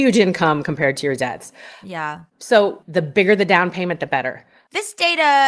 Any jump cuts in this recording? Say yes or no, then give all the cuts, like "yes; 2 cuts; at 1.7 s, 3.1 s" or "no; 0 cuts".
yes; 1 cut; at 2.3 s